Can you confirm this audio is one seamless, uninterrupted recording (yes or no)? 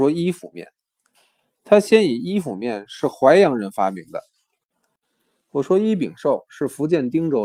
yes